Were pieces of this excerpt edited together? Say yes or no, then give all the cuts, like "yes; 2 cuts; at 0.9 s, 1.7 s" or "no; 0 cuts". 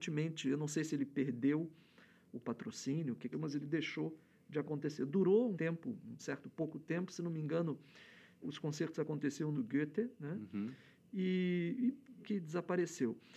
yes; 6 cuts; at 3.3 s, 5.5 s, 6.2 s, 8.4 s, 9.5 s, 12.2 s